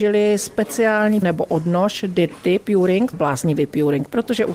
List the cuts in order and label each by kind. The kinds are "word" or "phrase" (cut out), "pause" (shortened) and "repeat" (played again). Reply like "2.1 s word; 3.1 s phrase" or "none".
1.2 s word; 3.1 s phrase

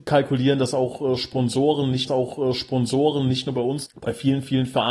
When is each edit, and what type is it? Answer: 2.1 s repeat; 3.9 s word

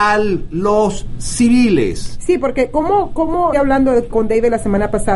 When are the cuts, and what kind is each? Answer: 3.5 s word

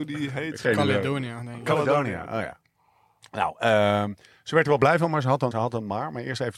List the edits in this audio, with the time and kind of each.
5.5 s word

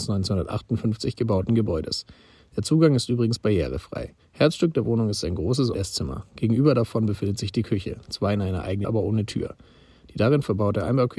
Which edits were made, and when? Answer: 5.7 s phrase; 8.8 s word

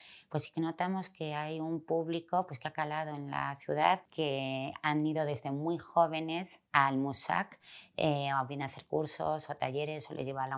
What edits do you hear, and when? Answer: 6.7 s pause

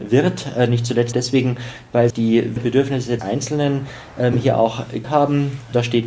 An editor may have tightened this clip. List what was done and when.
1.1 s word; 2.1 s word; 2.6 s word; 3.2 s word; 5.0 s word

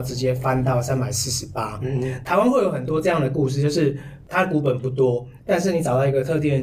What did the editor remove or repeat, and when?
5.4 s pause

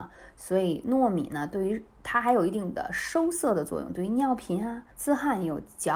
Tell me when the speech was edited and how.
4.9 s pause

